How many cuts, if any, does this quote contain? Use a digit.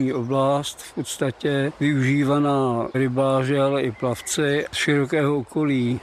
2